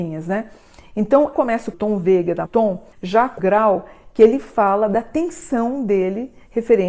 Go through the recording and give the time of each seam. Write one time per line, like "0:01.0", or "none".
0:01.3
0:01.7
0:02.4
0:02.9
0:03.4